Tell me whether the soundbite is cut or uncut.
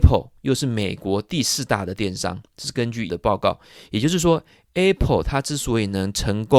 cut